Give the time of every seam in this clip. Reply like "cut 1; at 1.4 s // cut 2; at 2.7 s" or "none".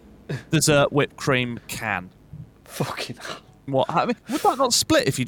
cut 1; at 1.6 s // cut 2; at 3.7 s // cut 3; at 4.2 s